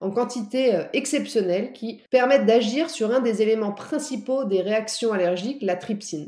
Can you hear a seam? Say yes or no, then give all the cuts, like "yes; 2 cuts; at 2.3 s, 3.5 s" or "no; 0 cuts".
no; 0 cuts